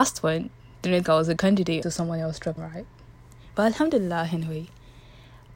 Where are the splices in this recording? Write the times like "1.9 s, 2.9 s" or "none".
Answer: 1.1 s, 1.4 s, 1.8 s, 2.6 s

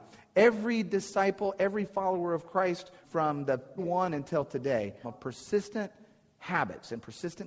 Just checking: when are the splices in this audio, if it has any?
3.0 s, 3.8 s, 5.0 s

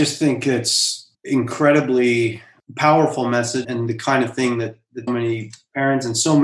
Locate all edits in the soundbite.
1.1 s, 3.6 s, 5.1 s

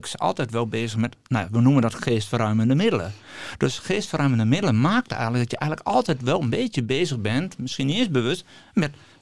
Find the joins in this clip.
none

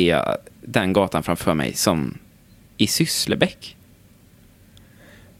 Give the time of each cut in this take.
none

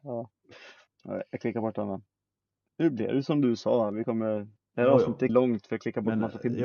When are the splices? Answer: 5.3 s

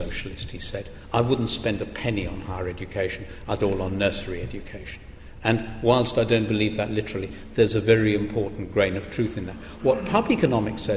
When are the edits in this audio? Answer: 3.6 s

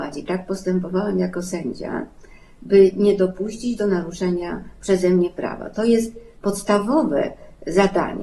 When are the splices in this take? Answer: none

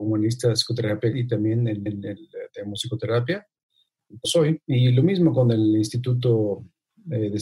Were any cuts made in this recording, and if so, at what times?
1.1 s, 1.9 s, 4.2 s, 4.6 s

